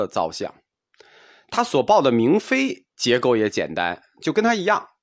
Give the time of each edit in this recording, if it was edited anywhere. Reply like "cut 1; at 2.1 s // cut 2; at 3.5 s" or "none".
cut 1; at 2.9 s